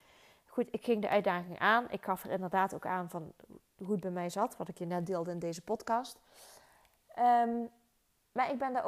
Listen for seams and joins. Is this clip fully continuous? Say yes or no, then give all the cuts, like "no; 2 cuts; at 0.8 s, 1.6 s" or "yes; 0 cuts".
yes; 0 cuts